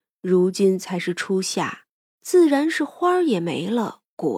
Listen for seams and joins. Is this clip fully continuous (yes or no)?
yes